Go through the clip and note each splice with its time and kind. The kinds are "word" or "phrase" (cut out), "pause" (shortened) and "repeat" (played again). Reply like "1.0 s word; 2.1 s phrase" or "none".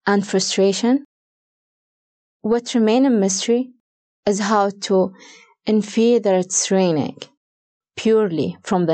none